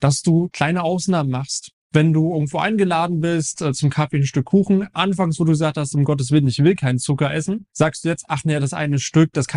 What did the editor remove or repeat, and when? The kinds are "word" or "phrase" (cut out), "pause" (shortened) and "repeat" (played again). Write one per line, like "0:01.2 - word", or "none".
0:01.8 - pause
0:07.7 - pause